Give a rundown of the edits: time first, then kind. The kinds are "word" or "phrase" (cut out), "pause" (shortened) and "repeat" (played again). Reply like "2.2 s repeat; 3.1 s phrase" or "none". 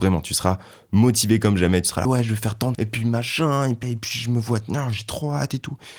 2.0 s word; 2.7 s word; 3.8 s word